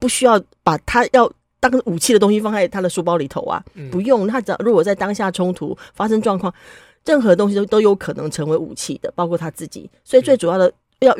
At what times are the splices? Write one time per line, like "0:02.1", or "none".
none